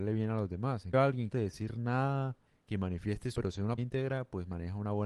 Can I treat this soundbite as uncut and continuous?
no; 5 cuts; at 0.9 s, 1.3 s, 2.5 s, 3.3 s, 3.8 s

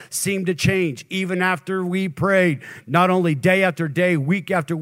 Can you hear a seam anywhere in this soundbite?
no; 0 cuts

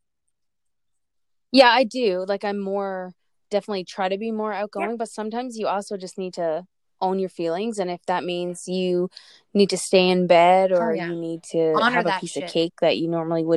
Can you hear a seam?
no; 0 cuts

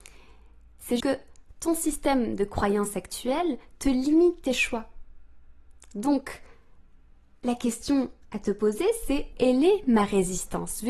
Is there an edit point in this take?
yes; 2 cuts; at 1.0 s, 9.3 s

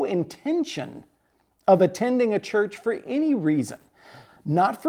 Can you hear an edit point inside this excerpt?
no; 0 cuts

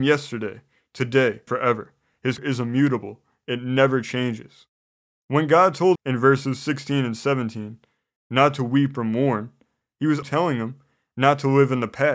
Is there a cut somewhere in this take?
yes; 4 cuts; at 1.5 s, 2.4 s, 6.0 s, 10.2 s

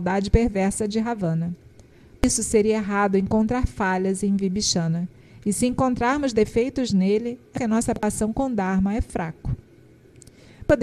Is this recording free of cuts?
yes; 0 cuts

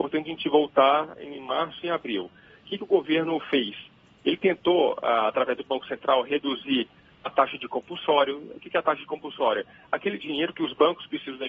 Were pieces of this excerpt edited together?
no; 0 cuts

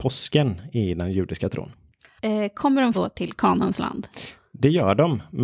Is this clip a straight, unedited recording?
no; 1 cut; at 2.9 s

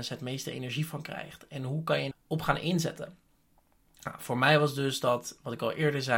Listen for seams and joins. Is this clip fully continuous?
no; 1 cut; at 2.1 s

